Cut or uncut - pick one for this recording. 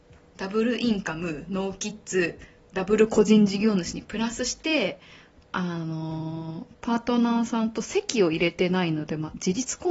uncut